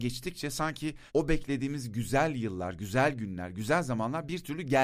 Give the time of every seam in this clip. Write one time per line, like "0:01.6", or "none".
0:01.1